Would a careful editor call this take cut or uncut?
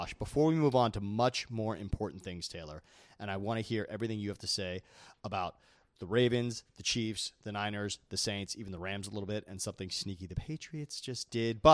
uncut